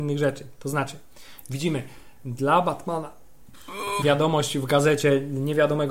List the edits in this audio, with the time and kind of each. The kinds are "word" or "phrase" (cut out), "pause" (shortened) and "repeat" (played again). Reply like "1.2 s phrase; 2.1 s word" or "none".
4.0 s word